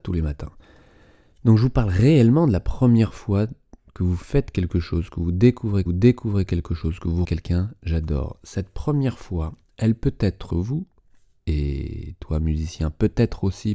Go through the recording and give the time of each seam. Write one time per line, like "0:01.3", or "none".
0:05.9
0:07.2
0:10.5